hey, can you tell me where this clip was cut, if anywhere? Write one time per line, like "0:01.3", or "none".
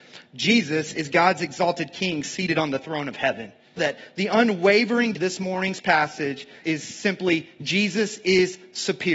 0:03.8
0:05.1
0:06.6